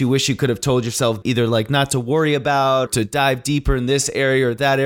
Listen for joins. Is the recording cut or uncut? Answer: cut